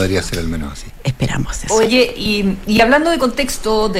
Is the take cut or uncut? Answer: uncut